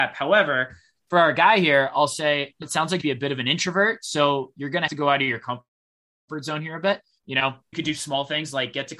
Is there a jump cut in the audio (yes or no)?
yes